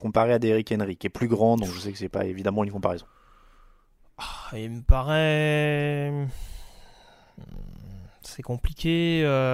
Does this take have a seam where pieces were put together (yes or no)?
no